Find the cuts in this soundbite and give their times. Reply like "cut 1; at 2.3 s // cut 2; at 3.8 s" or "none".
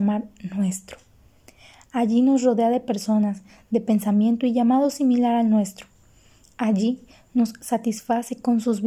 none

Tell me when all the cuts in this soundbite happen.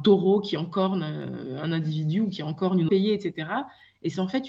cut 1; at 2.9 s

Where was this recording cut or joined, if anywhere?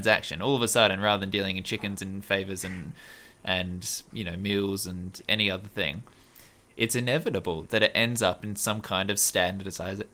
cut 1; at 4.1 s

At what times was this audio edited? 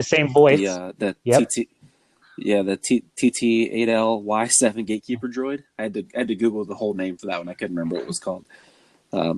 none

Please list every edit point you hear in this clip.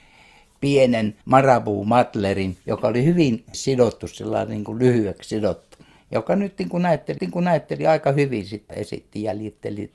cut 1; at 1.2 s // cut 2; at 2.6 s // cut 3; at 3.5 s // cut 4; at 6.0 s // cut 5; at 7.2 s // cut 6; at 8.7 s

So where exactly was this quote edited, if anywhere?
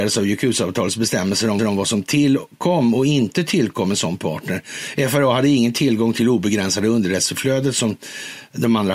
cut 1; at 1.6 s

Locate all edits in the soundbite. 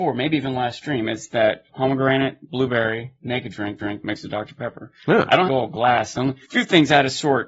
cut 1; at 1.7 s // cut 2; at 3.8 s // cut 3; at 5.5 s // cut 4; at 6.4 s

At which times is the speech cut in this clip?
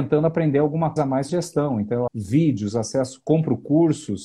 cut 1; at 1.0 s // cut 2; at 1.3 s // cut 3; at 2.1 s

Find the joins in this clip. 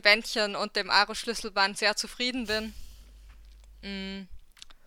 cut 1; at 1.7 s

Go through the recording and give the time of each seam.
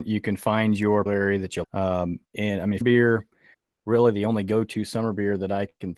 cut 1; at 1.1 s // cut 2; at 1.6 s // cut 3; at 2.2 s // cut 4; at 2.8 s

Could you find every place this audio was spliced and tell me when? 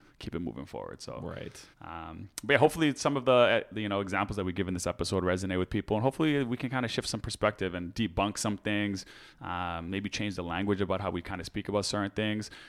cut 1; at 1.7 s

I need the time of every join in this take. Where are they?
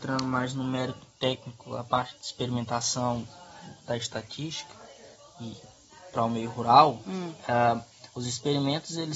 cut 1; at 2.1 s

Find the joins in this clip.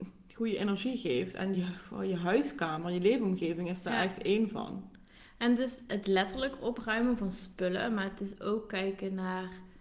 none

